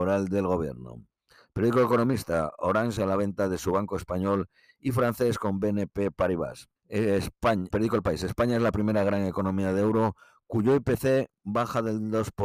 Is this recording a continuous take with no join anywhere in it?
no; 3 cuts; at 3.0 s, 6.8 s, 7.7 s

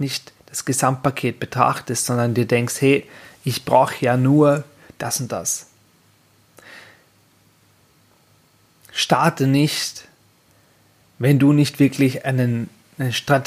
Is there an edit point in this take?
no; 0 cuts

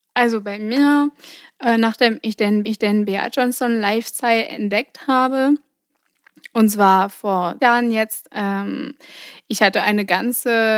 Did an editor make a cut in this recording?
yes; 2 cuts; at 2.6 s, 7.6 s

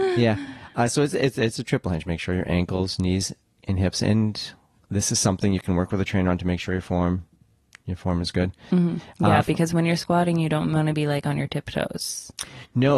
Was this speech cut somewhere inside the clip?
no; 0 cuts

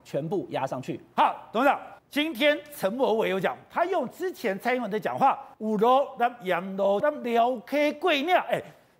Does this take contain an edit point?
yes; 3 cuts; at 2.0 s, 5.5 s, 7.0 s

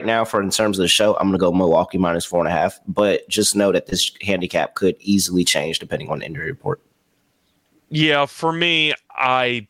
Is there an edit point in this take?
no; 0 cuts

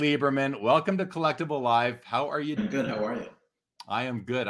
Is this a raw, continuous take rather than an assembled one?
no; 1 cut; at 2.6 s

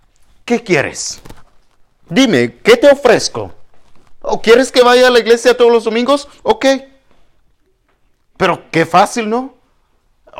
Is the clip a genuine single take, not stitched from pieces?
yes; 0 cuts

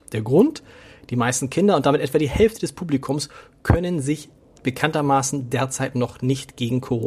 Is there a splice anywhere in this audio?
no; 0 cuts

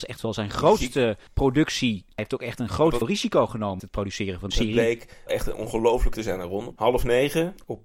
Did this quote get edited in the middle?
yes; 7 cuts; at 2.2 s, 3.0 s, 3.8 s, 4.5 s, 5.3 s, 6.1 s, 6.8 s

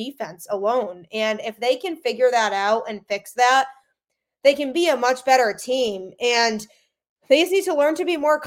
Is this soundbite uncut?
yes; 0 cuts

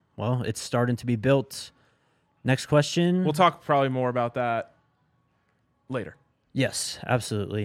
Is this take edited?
no; 0 cuts

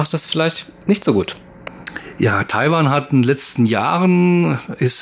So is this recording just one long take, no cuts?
yes; 0 cuts

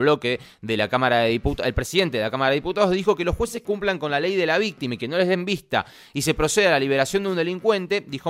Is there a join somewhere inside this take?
yes; 1 cut; at 3.6 s

